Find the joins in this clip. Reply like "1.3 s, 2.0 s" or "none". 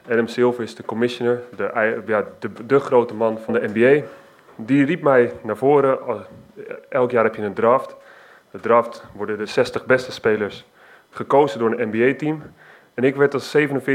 none